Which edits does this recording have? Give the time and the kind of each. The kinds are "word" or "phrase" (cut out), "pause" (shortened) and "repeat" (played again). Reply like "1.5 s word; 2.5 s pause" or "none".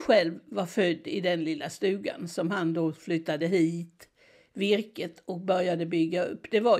none